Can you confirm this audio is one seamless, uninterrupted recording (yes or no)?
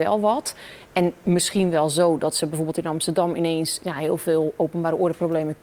yes